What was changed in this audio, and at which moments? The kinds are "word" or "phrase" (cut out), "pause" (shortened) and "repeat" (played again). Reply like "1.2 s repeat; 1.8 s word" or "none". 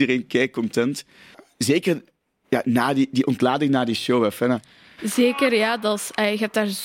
none

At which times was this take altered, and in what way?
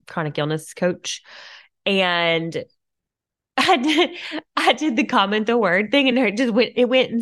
none

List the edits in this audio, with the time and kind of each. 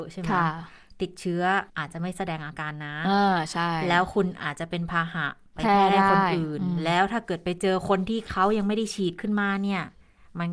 1.7 s pause

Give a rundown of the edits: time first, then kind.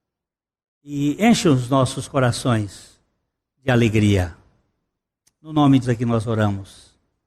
5.8 s word

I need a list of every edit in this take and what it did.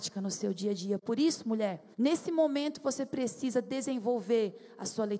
1.9 s pause

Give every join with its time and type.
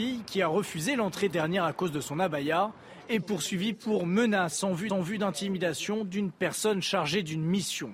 1.3 s word; 4.9 s repeat

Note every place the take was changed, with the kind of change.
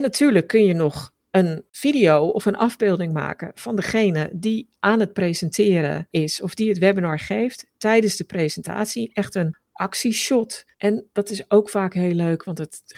10.7 s pause

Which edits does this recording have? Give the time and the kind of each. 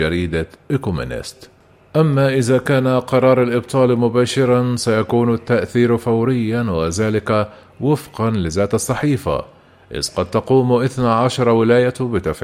none

